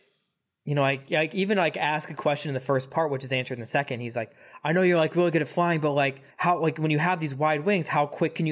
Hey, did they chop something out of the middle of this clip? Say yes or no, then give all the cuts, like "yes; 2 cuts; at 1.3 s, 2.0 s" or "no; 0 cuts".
yes; 1 cut; at 6.3 s